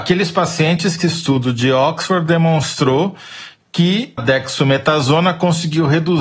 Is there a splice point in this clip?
yes; 2 cuts; at 1.0 s, 4.2 s

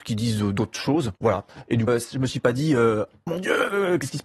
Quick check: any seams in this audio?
yes; 3 cuts; at 1.2 s, 1.9 s, 3.3 s

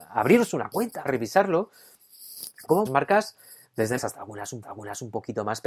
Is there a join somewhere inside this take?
yes; 4 cuts; at 1.1 s, 2.9 s, 4.0 s, 4.6 s

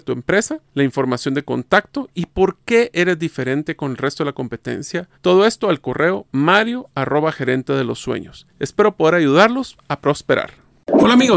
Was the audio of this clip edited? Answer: yes; 2 cuts; at 5.1 s, 8.5 s

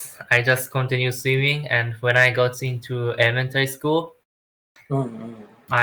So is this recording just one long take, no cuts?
yes; 0 cuts

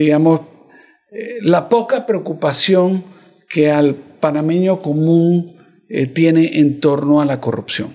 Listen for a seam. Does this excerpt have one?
no; 0 cuts

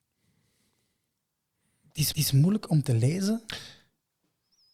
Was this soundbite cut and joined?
yes; 1 cut; at 2.1 s

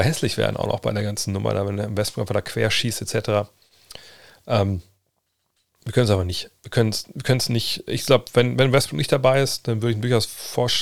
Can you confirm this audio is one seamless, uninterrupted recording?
yes; 0 cuts

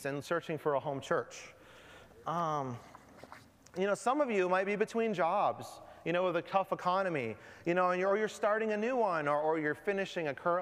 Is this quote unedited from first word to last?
yes; 0 cuts

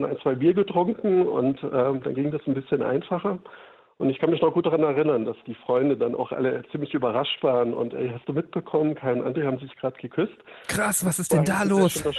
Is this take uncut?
yes; 0 cuts

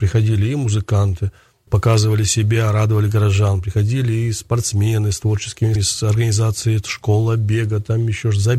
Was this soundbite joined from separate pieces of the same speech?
yes; 2 cuts; at 1.7 s, 5.8 s

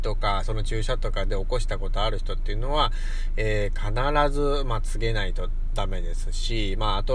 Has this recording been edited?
no; 0 cuts

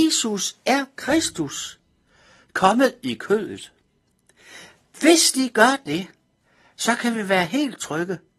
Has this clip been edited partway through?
no; 0 cuts

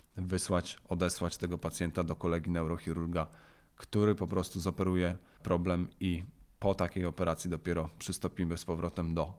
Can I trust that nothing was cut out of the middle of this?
yes; 0 cuts

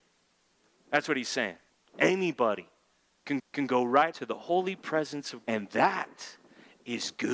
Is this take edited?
yes; 4 cuts; at 1.7 s, 3.4 s, 4.1 s, 5.4 s

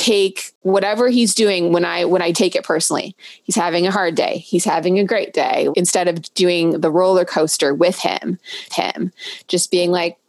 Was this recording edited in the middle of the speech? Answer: yes; 3 cuts; at 2.3 s, 5.7 s, 8.7 s

